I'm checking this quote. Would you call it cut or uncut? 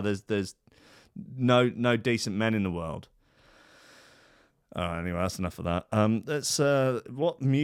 uncut